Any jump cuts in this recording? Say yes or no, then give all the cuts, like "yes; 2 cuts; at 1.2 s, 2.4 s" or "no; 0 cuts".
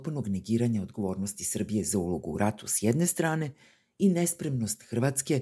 no; 0 cuts